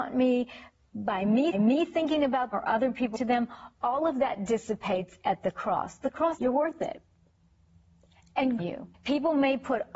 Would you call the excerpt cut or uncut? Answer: cut